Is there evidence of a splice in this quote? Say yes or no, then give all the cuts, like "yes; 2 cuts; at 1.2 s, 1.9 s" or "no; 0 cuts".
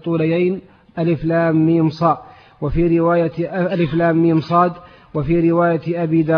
no; 0 cuts